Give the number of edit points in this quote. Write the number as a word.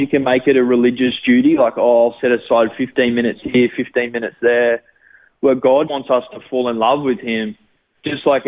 one